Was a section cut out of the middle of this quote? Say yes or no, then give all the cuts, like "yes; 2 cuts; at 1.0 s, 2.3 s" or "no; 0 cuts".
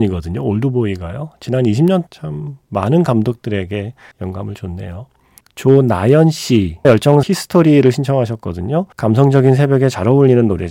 yes; 6 cuts; at 2.1 s, 4.1 s, 5.4 s, 6.8 s, 7.2 s, 8.9 s